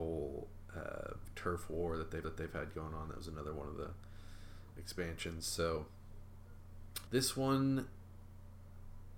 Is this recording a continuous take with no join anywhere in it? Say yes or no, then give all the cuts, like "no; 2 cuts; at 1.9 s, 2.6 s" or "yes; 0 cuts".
no; 3 cuts; at 2.2 s, 4.7 s, 7.1 s